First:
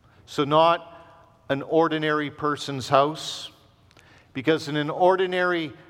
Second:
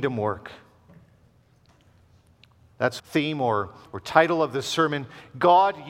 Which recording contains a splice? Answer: second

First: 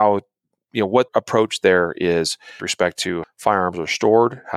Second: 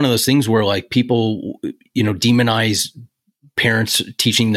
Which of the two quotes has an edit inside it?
first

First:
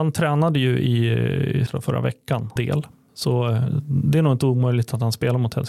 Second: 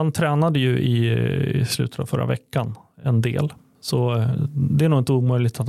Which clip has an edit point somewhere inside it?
first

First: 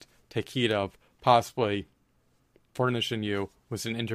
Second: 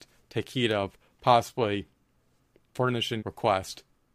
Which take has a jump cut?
second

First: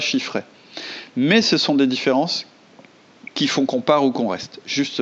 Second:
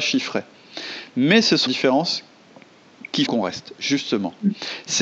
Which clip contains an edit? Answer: second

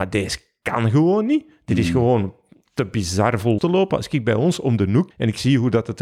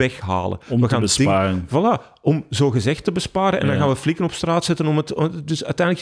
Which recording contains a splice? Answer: first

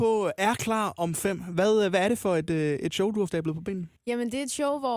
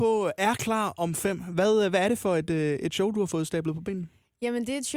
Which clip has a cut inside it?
first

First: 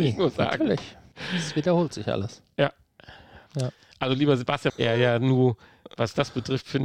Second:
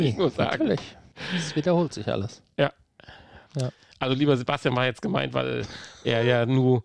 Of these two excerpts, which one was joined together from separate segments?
first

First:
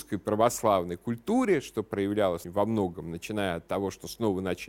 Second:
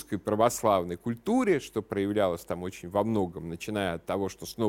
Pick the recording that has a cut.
first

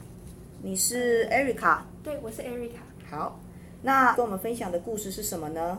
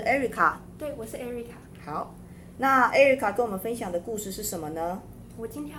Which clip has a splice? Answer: first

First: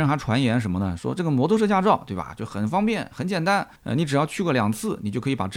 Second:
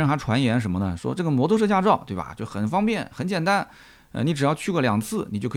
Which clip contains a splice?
first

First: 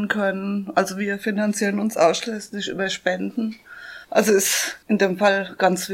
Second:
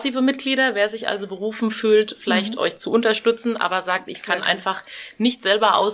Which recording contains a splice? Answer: first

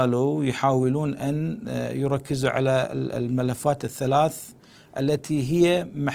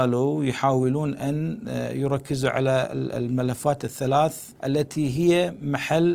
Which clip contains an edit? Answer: second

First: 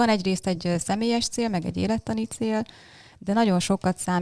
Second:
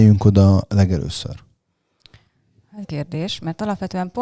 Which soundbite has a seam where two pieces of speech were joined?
second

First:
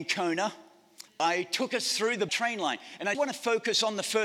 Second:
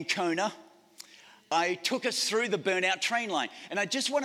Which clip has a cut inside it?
first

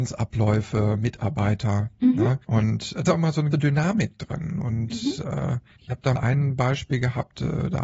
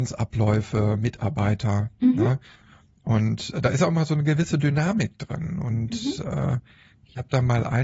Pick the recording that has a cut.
first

